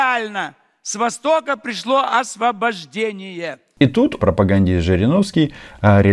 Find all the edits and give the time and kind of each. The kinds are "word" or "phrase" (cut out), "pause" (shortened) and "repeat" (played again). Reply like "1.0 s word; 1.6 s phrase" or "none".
4.2 s word